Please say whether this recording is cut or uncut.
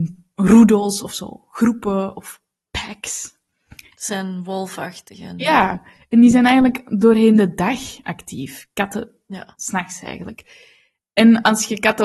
uncut